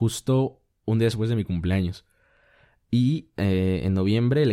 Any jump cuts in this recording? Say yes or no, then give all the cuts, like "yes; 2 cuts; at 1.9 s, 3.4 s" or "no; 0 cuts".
no; 0 cuts